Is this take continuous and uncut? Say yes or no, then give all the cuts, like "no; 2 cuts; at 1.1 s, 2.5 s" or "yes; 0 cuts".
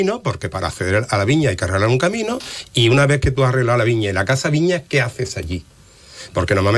yes; 0 cuts